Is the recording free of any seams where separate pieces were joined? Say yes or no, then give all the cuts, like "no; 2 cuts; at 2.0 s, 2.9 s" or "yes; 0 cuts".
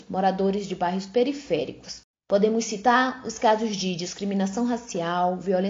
yes; 0 cuts